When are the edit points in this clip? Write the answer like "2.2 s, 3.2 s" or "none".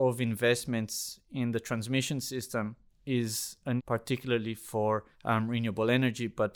3.8 s, 5.1 s